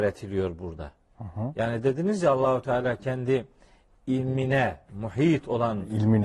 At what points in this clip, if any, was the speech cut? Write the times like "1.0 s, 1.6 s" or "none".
none